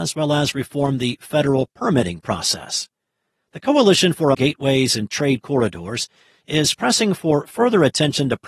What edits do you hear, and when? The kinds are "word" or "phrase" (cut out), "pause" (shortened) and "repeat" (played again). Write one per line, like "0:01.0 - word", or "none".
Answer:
0:04.3 - word